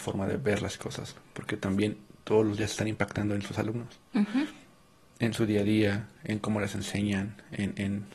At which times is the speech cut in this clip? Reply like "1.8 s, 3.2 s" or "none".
none